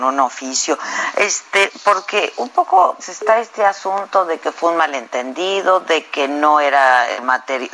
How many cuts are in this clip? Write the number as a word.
one